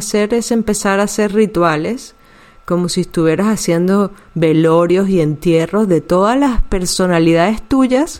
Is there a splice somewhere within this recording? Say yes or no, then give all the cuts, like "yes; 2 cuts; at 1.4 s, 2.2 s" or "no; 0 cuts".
no; 0 cuts